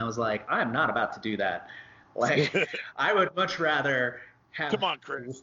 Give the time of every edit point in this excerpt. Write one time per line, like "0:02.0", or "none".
none